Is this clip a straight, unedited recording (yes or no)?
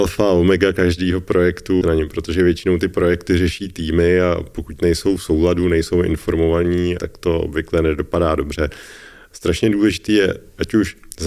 no